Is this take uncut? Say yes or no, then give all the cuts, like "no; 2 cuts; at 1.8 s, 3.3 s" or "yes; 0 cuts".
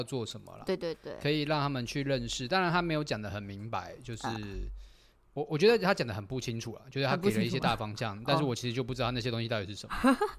yes; 0 cuts